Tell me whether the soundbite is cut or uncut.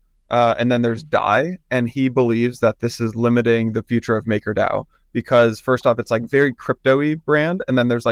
uncut